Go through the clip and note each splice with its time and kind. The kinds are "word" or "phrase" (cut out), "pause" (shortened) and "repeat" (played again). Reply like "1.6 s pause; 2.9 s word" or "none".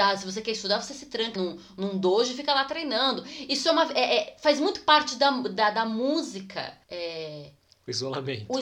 1.4 s word; 6.8 s pause